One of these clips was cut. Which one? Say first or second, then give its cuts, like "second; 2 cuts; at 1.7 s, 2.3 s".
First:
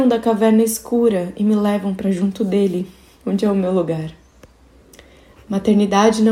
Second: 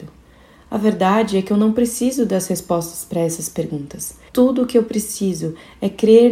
second; 1 cut; at 4.3 s